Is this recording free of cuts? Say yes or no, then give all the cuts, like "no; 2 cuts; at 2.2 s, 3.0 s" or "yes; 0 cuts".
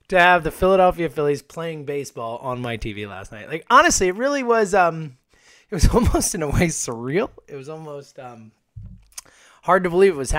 yes; 0 cuts